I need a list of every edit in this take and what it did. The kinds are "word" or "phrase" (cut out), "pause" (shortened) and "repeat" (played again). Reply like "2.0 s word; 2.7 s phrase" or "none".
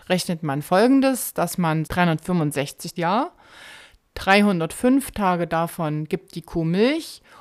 1.9 s word; 3.0 s phrase